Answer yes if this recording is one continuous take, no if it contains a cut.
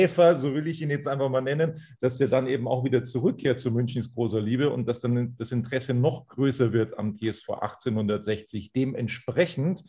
yes